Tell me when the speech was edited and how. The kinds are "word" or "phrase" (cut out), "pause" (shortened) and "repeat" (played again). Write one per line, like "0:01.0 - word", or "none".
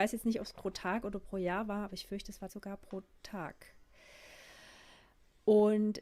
0:02.5 - word